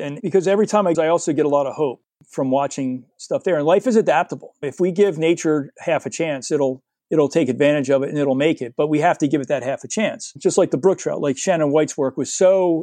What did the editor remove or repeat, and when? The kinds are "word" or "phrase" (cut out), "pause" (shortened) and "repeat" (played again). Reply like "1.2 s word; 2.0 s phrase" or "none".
0.9 s phrase; 2.2 s pause; 7.0 s pause